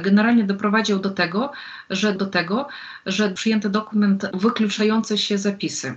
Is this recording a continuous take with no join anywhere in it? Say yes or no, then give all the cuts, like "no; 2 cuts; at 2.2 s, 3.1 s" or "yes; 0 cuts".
no; 2 cuts; at 2.2 s, 4.3 s